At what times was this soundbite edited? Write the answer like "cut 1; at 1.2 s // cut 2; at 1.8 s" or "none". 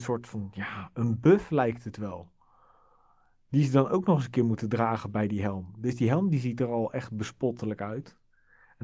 none